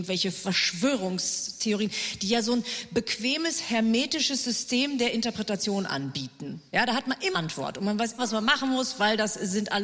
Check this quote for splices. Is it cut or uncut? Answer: cut